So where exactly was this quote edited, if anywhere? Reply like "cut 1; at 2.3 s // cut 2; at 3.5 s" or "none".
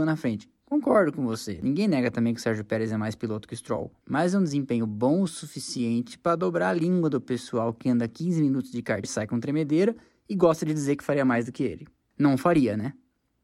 cut 1; at 9.0 s